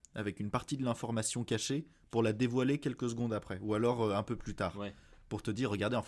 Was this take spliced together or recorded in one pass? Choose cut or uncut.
uncut